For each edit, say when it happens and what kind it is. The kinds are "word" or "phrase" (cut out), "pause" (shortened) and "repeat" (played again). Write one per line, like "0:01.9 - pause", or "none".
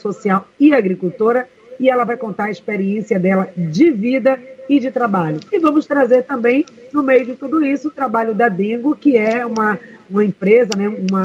0:05.5 - pause